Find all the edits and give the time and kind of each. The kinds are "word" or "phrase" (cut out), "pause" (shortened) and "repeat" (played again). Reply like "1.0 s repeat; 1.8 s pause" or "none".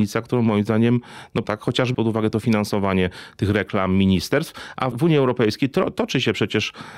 1.4 s word; 1.9 s word; 4.9 s word